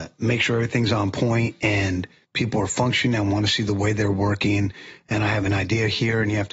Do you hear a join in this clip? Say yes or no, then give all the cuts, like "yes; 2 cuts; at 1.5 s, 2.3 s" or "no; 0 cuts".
no; 0 cuts